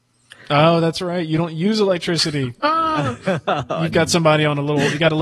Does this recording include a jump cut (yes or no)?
yes